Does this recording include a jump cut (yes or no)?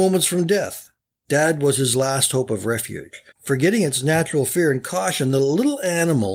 yes